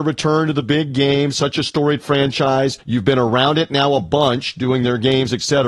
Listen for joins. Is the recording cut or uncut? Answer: cut